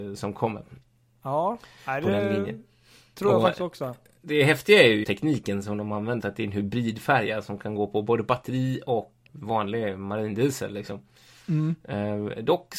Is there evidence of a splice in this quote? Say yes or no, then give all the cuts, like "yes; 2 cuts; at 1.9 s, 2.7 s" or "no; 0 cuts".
yes; 3 cuts; at 5.0 s, 6.2 s, 9.2 s